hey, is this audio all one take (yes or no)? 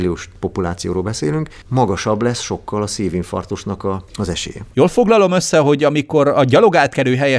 yes